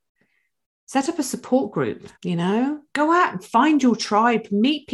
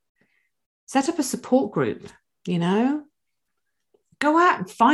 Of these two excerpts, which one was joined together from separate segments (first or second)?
first